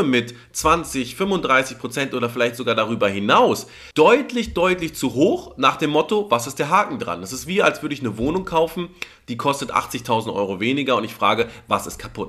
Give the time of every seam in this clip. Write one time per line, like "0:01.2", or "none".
0:03.9